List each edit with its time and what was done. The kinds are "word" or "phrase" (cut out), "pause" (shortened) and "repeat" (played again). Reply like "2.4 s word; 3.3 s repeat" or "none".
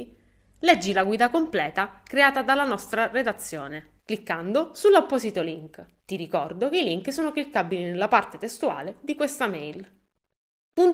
4.0 s pause; 6.0 s pause